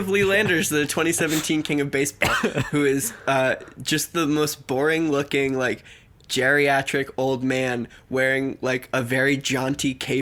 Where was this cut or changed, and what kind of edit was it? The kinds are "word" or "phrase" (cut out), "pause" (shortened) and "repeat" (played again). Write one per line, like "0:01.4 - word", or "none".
none